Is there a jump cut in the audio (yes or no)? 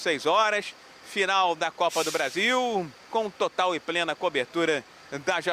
yes